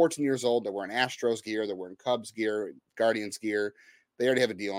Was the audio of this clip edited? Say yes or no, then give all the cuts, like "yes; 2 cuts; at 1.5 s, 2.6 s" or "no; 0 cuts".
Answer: no; 0 cuts